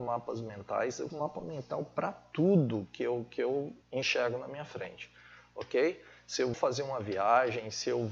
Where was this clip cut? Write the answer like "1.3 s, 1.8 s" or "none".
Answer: 1.1 s, 3.8 s, 6.5 s